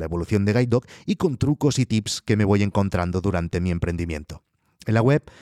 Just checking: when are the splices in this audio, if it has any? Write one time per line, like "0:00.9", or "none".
none